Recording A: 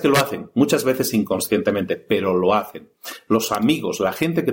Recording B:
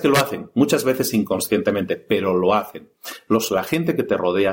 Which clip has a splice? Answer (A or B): B